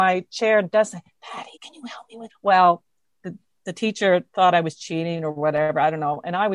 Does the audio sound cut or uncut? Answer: cut